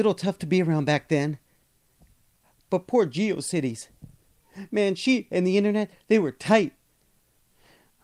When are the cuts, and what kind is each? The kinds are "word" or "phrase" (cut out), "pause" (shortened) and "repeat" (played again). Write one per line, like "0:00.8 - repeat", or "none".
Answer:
none